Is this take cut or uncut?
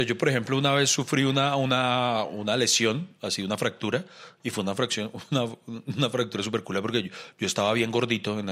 uncut